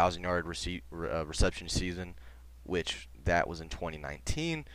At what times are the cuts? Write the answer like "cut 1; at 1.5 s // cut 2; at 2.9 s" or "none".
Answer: none